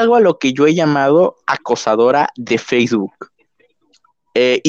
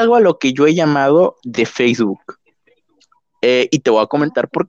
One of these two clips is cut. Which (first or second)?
second